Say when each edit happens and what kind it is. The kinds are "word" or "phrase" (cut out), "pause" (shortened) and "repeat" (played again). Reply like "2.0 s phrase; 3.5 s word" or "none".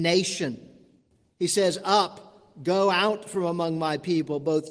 none